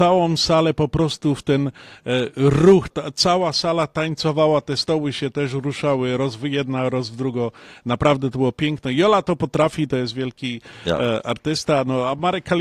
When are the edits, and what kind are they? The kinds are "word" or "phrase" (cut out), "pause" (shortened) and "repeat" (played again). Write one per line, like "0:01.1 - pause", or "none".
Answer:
0:02.9 - word